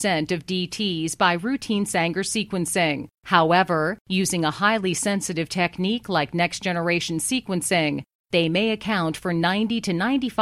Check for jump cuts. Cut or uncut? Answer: uncut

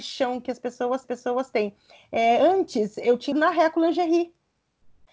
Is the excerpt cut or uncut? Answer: cut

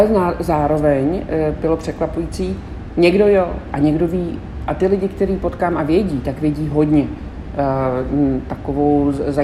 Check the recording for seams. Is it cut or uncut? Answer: uncut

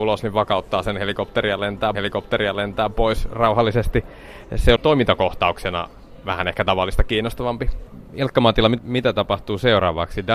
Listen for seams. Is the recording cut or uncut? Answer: cut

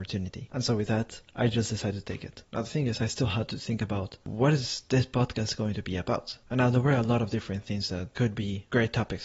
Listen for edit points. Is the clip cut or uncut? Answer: uncut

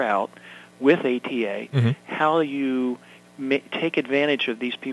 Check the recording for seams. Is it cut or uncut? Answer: uncut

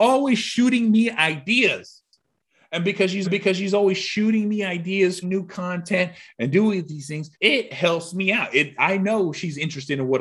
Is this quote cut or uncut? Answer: cut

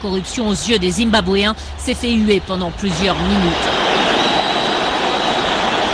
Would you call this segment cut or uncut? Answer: uncut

